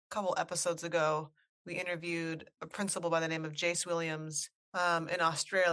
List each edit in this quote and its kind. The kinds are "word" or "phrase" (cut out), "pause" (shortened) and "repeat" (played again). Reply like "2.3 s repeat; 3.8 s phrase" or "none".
2.6 s word